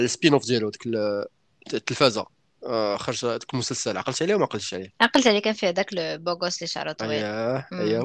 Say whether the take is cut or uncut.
uncut